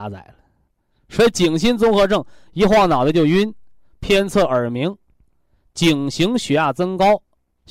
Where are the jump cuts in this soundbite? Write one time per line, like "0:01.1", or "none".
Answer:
none